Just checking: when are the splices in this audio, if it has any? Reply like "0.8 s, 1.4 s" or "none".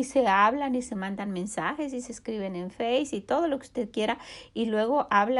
none